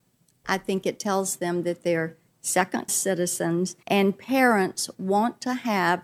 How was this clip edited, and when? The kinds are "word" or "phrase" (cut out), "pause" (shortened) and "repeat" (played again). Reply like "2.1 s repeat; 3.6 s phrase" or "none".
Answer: 2.9 s word; 3.8 s pause